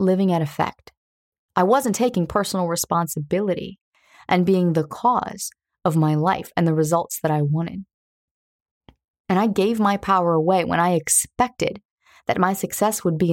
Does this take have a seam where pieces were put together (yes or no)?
no